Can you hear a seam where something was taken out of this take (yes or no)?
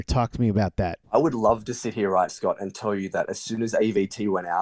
yes